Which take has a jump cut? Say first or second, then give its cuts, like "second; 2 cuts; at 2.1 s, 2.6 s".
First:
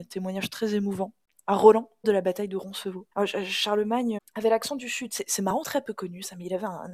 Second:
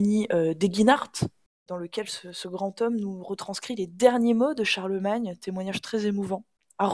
first; 4 cuts; at 2.0 s, 3.1 s, 4.2 s, 5.6 s